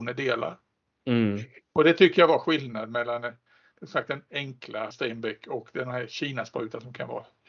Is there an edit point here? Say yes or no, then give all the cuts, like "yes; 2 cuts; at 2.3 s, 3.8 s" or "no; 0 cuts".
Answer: yes; 1 cut; at 4.9 s